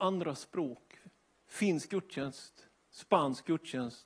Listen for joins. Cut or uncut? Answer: cut